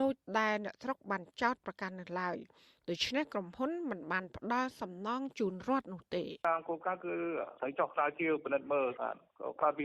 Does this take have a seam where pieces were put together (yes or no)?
yes